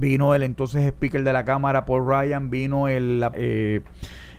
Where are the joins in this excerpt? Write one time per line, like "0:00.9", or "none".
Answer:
0:03.3